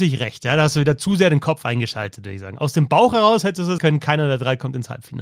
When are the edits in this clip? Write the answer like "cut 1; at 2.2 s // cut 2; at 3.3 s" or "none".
cut 1; at 3.8 s